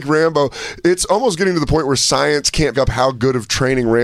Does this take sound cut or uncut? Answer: cut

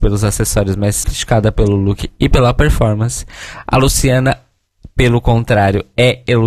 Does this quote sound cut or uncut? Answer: cut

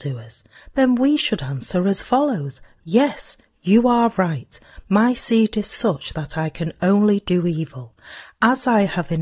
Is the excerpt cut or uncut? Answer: uncut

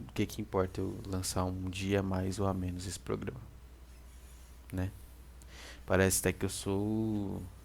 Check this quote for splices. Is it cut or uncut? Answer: uncut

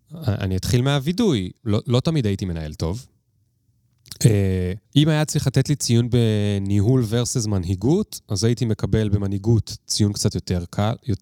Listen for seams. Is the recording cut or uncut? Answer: cut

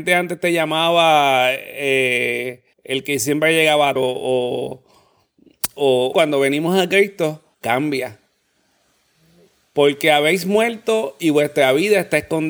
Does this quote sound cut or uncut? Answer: cut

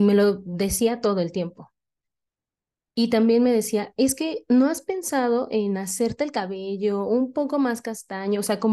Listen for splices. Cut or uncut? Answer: uncut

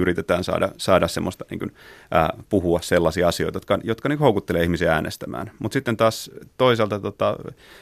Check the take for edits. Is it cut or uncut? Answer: uncut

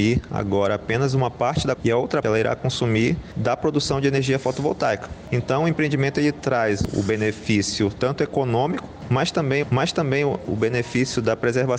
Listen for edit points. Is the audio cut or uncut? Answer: cut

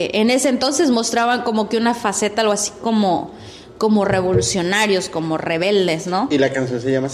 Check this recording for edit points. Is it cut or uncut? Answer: uncut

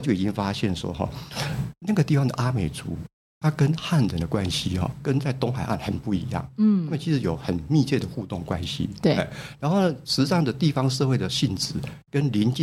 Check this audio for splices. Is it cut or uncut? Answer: uncut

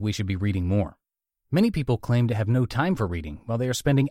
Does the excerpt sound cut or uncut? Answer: uncut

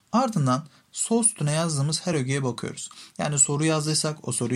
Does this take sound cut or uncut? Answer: uncut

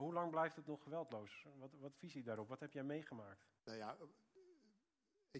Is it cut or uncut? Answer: cut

